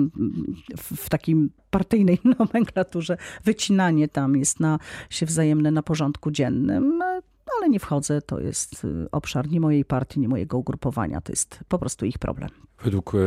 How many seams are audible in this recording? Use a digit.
0